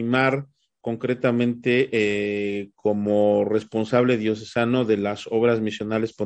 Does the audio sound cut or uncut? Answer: uncut